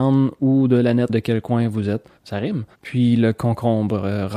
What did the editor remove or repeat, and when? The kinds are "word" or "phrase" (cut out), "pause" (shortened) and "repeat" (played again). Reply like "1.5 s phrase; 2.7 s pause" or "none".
1.1 s word; 2.2 s pause; 2.7 s pause